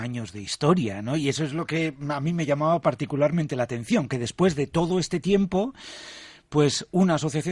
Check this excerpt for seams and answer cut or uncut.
uncut